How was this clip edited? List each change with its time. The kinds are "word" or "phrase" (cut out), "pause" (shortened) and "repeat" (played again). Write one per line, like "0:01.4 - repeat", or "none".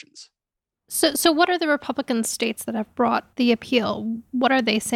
0:03.3 - pause